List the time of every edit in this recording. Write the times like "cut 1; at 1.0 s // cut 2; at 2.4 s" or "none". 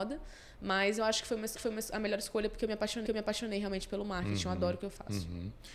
cut 1; at 1.6 s // cut 2; at 3.1 s